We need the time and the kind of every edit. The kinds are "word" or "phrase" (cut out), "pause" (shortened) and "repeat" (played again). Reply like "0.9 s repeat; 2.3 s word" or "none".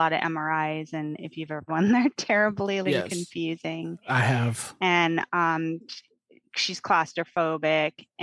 1.7 s word; 2.8 s word